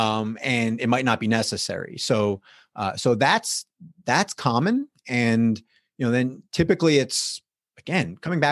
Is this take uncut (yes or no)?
yes